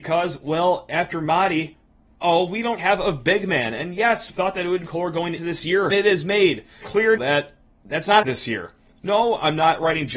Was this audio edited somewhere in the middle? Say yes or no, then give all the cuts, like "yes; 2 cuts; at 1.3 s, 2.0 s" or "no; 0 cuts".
yes; 9 cuts; at 2.2 s, 2.8 s, 4.3 s, 4.8 s, 5.4 s, 5.9 s, 6.8 s, 7.2 s, 8.2 s